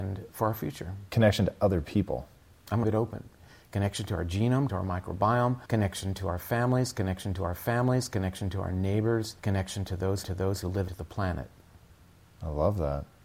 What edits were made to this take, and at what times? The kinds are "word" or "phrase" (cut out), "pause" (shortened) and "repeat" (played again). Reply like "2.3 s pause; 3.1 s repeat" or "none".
1.1 s pause; 2.8 s phrase; 4.7 s word; 5.7 s pause; 7.4 s repeat; 9.4 s pause; 10.2 s repeat; 10.9 s phrase